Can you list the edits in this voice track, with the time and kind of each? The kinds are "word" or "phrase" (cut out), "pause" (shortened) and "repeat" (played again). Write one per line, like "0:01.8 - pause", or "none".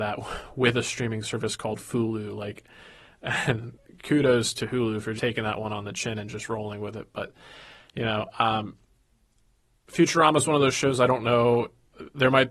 0:05.2 - word